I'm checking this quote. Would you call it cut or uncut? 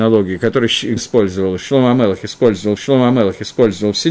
cut